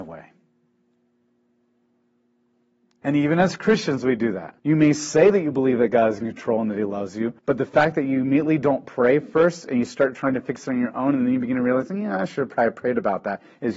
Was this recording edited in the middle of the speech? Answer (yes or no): yes